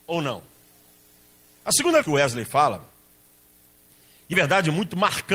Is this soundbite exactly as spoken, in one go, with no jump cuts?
no; 2 cuts; at 2.0 s, 4.3 s

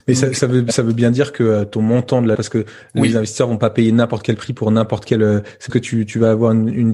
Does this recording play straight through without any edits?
no; 2 cuts; at 2.3 s, 5.7 s

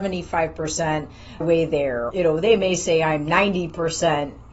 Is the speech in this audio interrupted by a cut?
yes; 2 cuts; at 1.4 s, 2.1 s

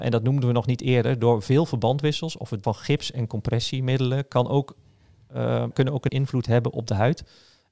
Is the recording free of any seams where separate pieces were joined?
no; 3 cuts; at 2.6 s, 5.7 s, 6.1 s

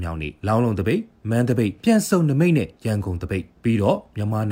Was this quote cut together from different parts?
no; 0 cuts

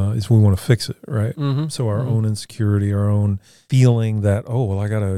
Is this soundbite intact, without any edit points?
yes; 0 cuts

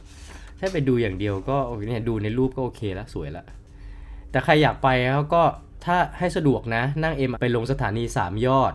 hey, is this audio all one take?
no; 1 cut; at 7.3 s

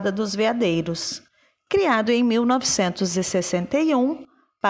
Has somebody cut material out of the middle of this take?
no; 0 cuts

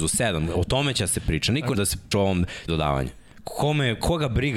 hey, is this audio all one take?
no; 3 cuts; at 1.7 s, 2.1 s, 2.7 s

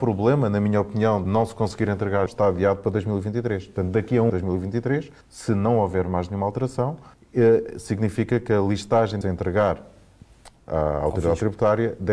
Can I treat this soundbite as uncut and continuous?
no; 6 cuts; at 1.2 s, 2.3 s, 4.3 s, 5.2 s, 7.1 s, 9.2 s

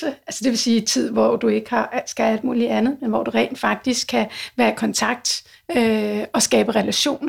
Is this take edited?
no; 0 cuts

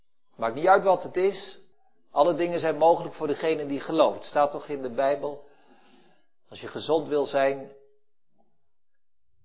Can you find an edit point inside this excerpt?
yes; 1 cut; at 1.7 s

